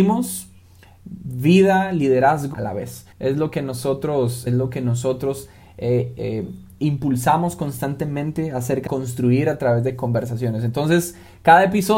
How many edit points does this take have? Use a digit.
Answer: 4